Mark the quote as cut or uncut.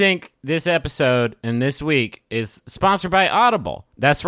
uncut